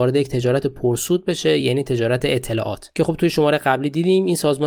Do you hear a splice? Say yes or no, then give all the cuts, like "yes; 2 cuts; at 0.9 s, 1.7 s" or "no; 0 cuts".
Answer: no; 0 cuts